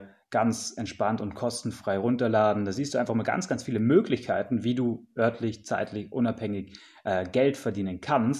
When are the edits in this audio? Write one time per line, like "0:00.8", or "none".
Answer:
none